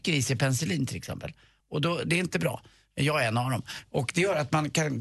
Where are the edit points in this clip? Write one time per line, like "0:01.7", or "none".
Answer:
none